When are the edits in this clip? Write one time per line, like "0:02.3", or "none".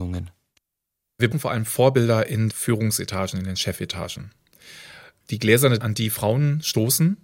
0:01.3
0:02.5
0:05.8